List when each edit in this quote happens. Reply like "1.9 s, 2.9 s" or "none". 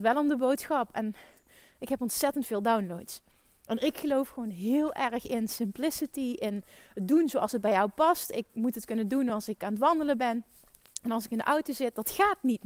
none